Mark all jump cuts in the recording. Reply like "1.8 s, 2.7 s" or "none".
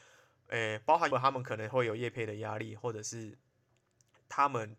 1.1 s